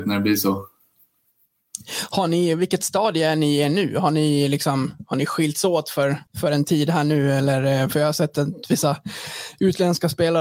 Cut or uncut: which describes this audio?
cut